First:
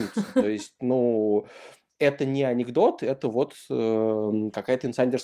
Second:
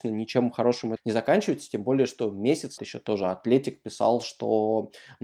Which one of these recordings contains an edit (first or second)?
second